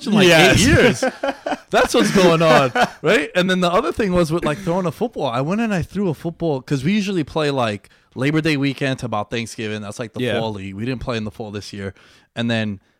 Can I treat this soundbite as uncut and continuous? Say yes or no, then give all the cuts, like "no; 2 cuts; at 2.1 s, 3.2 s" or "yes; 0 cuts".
yes; 0 cuts